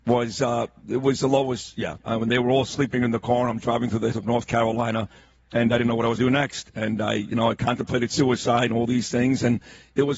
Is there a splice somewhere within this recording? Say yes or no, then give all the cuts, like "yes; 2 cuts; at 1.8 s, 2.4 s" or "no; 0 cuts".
yes; 2 cuts; at 4.1 s, 6.2 s